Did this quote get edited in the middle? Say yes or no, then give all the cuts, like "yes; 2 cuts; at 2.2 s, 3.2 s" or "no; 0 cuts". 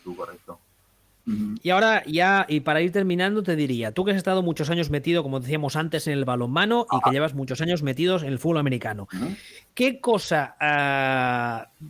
no; 0 cuts